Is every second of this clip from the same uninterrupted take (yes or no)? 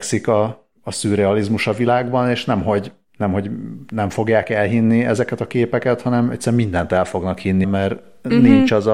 no